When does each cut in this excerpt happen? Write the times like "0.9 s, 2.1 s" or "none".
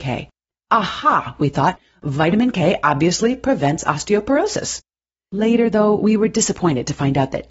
none